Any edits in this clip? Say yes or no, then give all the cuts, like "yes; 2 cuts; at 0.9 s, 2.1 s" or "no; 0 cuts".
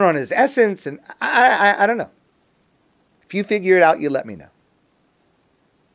no; 0 cuts